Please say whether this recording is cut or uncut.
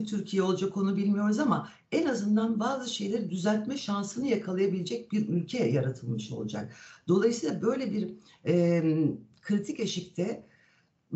uncut